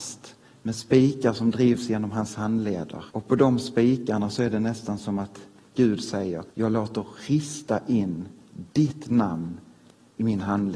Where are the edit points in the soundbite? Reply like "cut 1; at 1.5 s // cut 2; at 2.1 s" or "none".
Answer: cut 1; at 3.1 s // cut 2; at 6.5 s